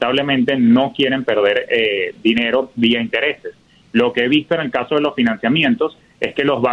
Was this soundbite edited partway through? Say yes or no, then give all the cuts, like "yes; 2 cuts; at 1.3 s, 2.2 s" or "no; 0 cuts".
no; 0 cuts